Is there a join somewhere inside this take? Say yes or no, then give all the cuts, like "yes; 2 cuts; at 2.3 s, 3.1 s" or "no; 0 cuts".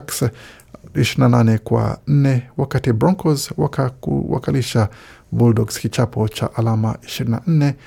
no; 0 cuts